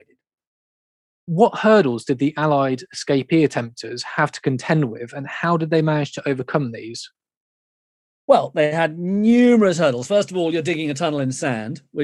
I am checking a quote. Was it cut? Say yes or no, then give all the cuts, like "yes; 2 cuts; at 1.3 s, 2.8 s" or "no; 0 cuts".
no; 0 cuts